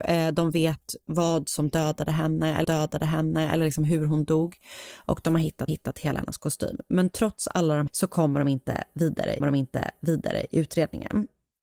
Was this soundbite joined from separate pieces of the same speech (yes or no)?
yes